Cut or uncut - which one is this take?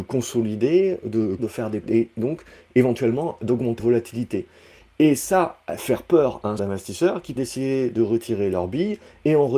cut